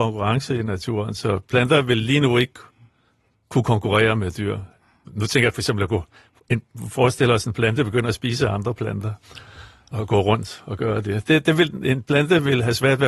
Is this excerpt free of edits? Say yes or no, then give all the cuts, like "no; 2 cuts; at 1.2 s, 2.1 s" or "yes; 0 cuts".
yes; 0 cuts